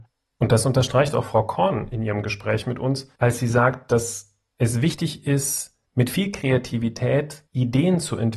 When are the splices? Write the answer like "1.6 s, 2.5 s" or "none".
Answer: 3.1 s, 5.9 s, 7.5 s